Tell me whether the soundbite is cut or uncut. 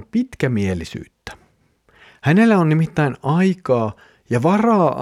uncut